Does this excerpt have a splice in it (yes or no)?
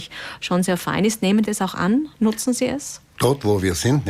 yes